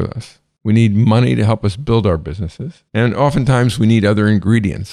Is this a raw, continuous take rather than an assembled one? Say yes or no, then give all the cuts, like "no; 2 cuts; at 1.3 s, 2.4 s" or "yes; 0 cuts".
no; 1 cut; at 2.9 s